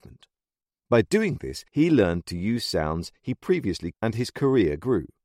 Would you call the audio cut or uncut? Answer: cut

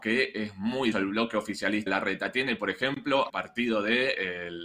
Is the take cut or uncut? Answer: cut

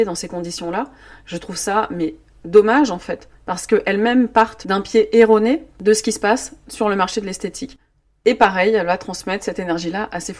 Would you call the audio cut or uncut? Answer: uncut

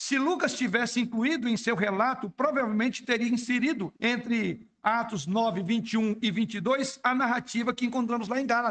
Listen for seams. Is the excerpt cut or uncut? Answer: cut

